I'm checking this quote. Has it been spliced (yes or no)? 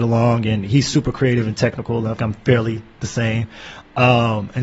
yes